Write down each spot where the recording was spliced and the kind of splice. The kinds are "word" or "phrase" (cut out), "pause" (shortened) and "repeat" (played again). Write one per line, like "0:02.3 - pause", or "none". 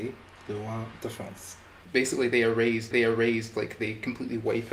0:02.9 - repeat